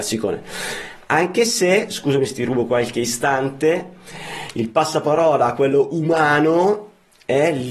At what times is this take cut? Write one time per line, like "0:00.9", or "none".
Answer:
none